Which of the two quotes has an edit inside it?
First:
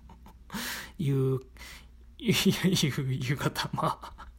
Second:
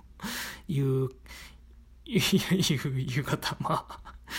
first; 1 cut; at 2.1 s

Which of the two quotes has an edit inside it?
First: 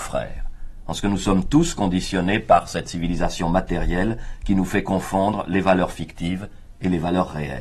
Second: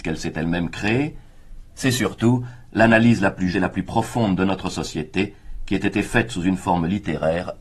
second; 1 cut; at 3.5 s

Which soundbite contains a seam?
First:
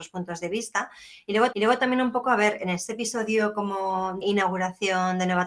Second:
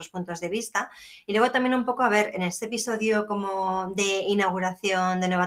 first; 2 cuts; at 1.5 s, 4.2 s

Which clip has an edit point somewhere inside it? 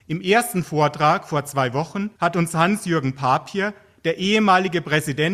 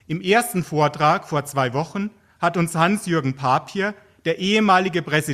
first; 1 cut; at 2.1 s

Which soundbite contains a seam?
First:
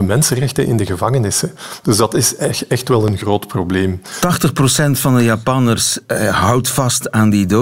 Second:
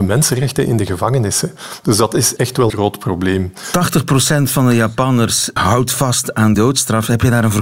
second; 4 cuts; at 2.4 s, 2.7 s, 5.6 s, 6.5 s

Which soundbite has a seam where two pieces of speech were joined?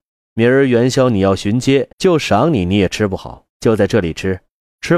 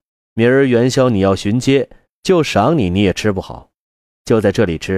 first; 2 cuts; at 1.9 s, 3.5 s

